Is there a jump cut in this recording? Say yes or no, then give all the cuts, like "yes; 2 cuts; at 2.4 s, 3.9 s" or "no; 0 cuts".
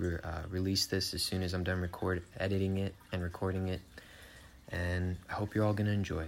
no; 0 cuts